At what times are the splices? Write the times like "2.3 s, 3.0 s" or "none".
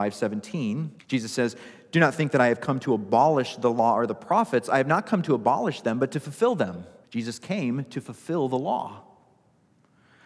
1.0 s, 7.0 s